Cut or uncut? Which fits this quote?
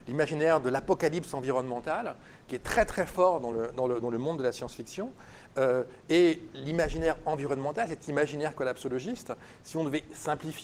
uncut